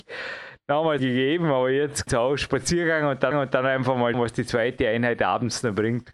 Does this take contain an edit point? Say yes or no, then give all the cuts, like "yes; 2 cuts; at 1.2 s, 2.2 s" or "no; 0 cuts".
yes; 4 cuts; at 1.0 s, 2.1 s, 3.3 s, 4.1 s